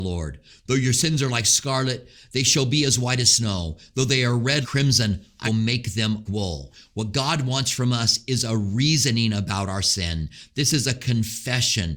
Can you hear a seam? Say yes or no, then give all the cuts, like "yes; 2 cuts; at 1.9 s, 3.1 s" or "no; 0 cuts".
yes; 3 cuts; at 4.6 s, 5.5 s, 6.3 s